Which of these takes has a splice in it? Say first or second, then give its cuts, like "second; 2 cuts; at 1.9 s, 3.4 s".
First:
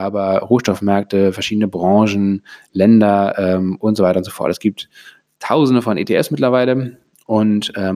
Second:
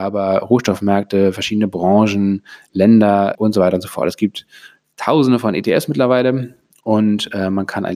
second; 1 cut; at 3.3 s